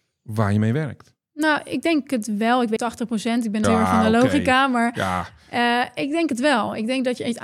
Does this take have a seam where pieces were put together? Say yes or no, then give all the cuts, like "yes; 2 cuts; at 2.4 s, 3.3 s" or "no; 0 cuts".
yes; 2 cuts; at 2.8 s, 3.6 s